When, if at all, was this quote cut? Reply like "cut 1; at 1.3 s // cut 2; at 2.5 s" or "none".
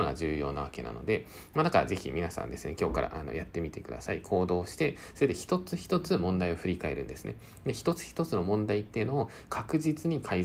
none